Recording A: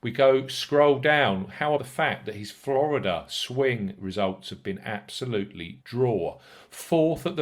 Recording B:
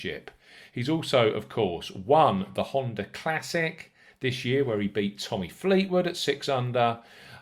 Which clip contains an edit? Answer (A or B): A